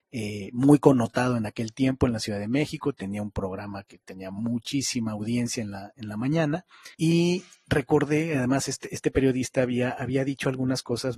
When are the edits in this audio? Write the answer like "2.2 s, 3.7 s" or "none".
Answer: 6.9 s